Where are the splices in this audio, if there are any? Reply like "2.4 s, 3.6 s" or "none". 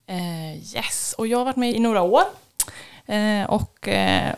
1.7 s